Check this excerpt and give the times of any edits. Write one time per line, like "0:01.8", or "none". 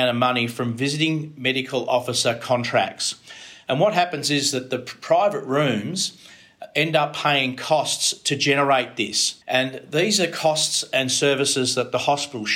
0:09.4